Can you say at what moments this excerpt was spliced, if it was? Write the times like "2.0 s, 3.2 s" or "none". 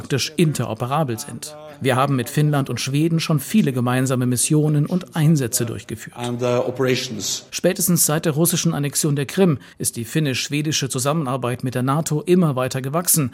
9.7 s